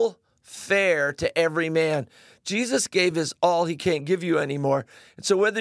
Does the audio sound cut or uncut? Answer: uncut